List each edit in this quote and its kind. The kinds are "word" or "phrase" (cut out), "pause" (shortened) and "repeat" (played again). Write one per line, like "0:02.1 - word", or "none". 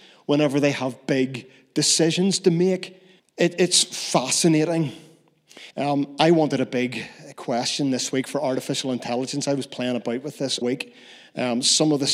0:03.2 - pause
0:05.7 - pause
0:10.6 - word